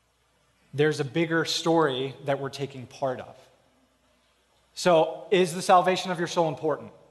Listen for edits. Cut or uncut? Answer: uncut